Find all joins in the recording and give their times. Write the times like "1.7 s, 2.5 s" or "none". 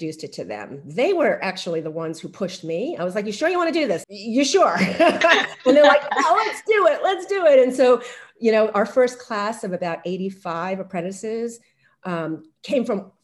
4.0 s